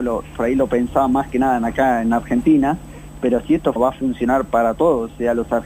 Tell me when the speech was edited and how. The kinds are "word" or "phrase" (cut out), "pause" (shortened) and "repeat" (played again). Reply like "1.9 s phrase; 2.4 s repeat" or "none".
3.8 s word